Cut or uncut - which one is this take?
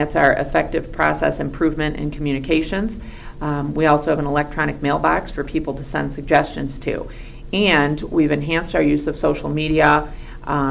uncut